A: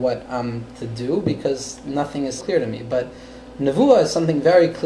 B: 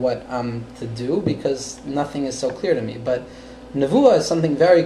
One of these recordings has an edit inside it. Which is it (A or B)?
A